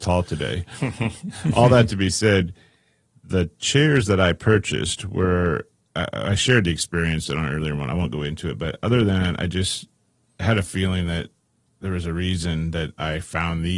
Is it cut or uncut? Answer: uncut